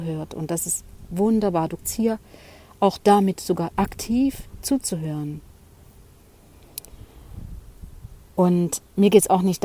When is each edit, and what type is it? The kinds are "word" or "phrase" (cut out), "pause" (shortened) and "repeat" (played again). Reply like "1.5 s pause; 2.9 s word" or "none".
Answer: 1.8 s word; 3.7 s word